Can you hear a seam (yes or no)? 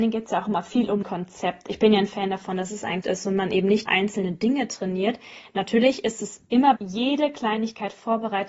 yes